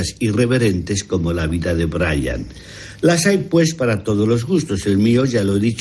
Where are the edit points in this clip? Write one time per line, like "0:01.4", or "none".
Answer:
none